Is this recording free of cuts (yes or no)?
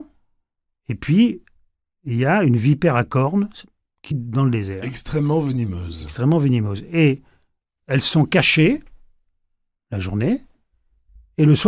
no